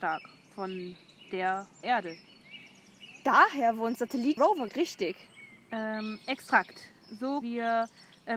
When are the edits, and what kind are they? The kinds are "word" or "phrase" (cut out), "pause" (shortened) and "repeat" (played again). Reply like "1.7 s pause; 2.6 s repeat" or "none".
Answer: 1.8 s word; 4.0 s word; 4.4 s word; 4.7 s word; 7.4 s word